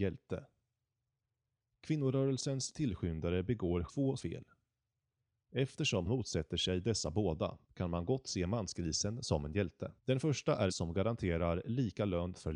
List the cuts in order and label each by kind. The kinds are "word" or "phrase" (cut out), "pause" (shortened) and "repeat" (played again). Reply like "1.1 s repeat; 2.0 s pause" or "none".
3.9 s word; 4.2 s word; 6.1 s word; 7.6 s pause; 10.0 s pause; 10.7 s word